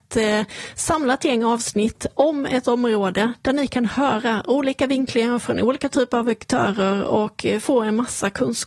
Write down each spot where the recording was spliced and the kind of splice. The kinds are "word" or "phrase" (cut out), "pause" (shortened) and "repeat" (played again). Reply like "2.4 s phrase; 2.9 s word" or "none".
none